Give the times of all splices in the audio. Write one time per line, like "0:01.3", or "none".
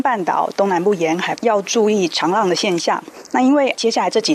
0:01.4